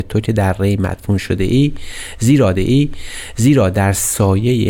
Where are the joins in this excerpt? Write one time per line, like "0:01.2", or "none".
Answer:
0:02.5